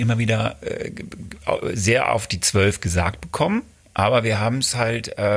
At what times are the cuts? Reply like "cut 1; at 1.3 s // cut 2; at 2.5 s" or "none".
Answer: none